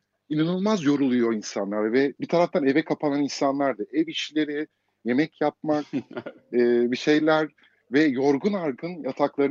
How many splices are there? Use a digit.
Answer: 0